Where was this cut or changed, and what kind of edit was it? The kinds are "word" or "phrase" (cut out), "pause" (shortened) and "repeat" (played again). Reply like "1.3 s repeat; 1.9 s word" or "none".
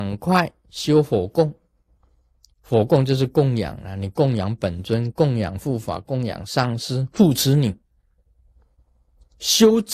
2.0 s pause